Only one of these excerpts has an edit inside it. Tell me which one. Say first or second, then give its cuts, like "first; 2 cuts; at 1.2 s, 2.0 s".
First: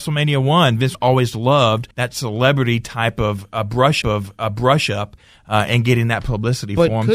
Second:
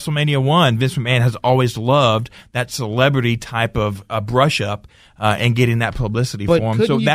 first; 3 cuts; at 0.9 s, 1.9 s, 4.0 s